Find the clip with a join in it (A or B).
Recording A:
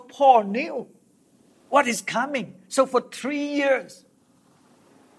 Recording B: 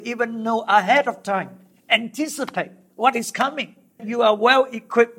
B